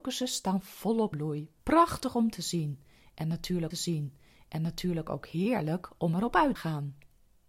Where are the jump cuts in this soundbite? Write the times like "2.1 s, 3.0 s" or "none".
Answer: 1.1 s, 1.6 s, 3.7 s, 6.6 s

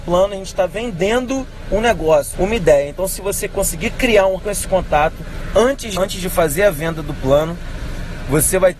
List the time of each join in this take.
2.3 s, 4.4 s, 6.0 s

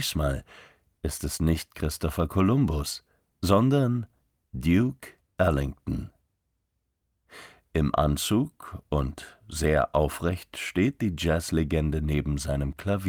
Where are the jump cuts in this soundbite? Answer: none

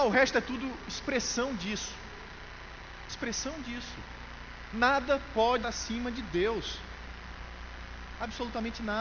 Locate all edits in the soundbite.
5.6 s

